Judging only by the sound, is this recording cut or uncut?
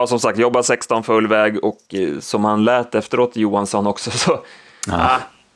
uncut